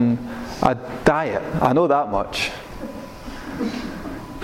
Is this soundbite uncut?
yes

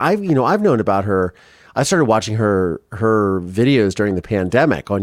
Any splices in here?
no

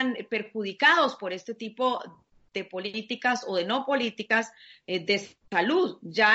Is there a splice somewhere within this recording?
no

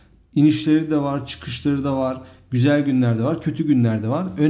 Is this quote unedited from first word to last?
yes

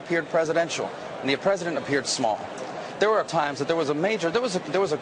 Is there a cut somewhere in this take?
yes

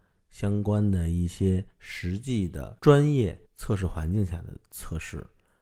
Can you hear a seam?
yes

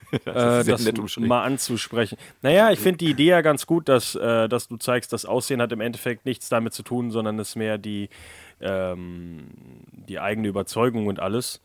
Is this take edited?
yes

